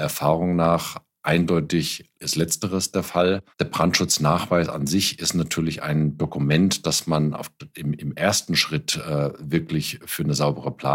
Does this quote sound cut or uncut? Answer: cut